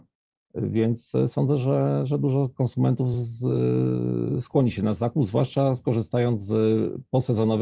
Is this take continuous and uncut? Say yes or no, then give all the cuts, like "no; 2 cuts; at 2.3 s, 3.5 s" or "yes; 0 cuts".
yes; 0 cuts